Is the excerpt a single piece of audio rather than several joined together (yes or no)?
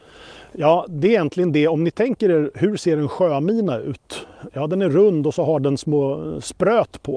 yes